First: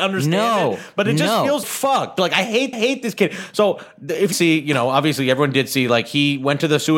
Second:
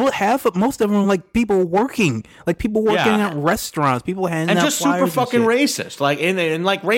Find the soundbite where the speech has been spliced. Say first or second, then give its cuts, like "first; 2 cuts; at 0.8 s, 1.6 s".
first; 3 cuts; at 1.6 s, 2.7 s, 4.3 s